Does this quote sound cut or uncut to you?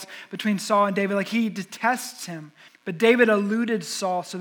cut